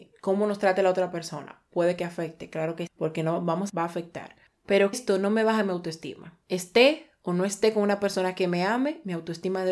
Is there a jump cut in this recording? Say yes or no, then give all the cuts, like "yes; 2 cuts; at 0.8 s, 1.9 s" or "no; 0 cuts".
yes; 4 cuts; at 2.9 s, 3.7 s, 4.9 s, 6.4 s